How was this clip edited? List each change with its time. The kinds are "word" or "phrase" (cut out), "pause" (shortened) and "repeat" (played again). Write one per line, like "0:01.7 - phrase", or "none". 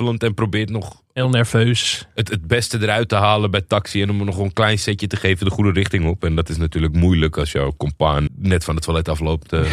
0:08.3 - word